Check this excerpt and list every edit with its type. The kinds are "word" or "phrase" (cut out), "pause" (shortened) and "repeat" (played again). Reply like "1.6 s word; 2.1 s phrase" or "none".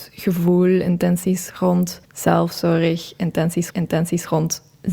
2.0 s pause; 3.7 s repeat